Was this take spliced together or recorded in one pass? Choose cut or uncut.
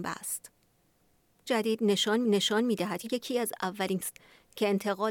cut